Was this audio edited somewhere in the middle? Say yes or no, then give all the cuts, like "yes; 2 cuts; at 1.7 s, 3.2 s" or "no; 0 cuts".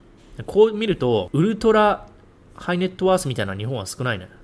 no; 0 cuts